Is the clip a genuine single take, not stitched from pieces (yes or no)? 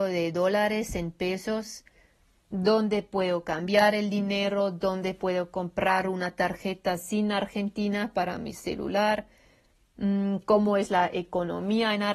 yes